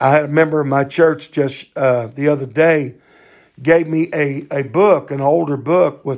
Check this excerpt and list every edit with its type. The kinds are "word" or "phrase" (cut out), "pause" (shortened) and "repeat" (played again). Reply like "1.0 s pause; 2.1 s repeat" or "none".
none